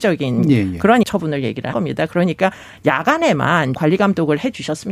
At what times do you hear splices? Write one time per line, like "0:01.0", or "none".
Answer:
0:01.0
0:01.7
0:03.7